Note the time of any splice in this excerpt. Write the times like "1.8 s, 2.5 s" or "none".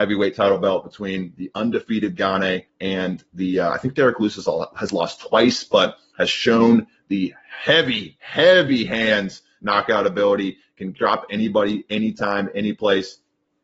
2.7 s